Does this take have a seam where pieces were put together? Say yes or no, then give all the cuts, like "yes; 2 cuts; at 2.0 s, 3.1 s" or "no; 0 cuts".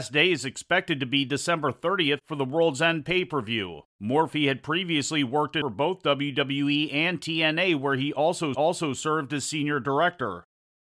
yes; 3 cuts; at 3.9 s, 5.6 s, 8.5 s